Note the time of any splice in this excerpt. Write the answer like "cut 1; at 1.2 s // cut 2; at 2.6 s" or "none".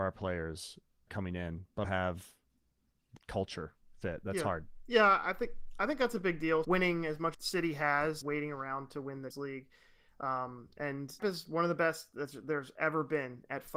cut 1; at 1.1 s // cut 2; at 1.8 s // cut 3; at 3.2 s // cut 4; at 6.6 s // cut 5; at 7.3 s // cut 6; at 8.2 s // cut 7; at 9.3 s // cut 8; at 11.2 s